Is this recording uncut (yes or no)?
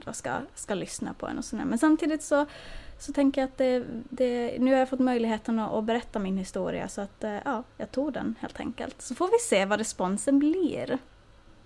yes